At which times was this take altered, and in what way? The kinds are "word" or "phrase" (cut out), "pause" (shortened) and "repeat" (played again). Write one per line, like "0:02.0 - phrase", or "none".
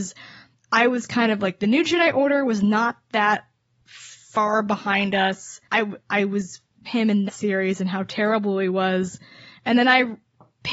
0:05.6 - pause
0:06.8 - phrase
0:07.3 - word

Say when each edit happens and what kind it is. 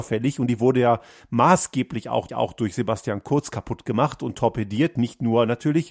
0:02.3 - repeat

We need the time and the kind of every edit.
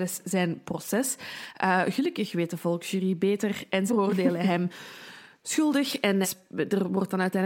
0:03.9 - word
0:06.2 - word

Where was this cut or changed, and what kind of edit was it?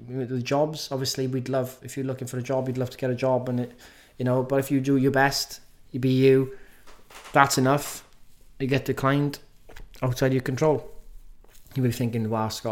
none

